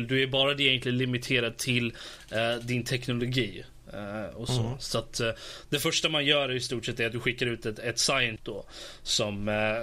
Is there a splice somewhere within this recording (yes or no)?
yes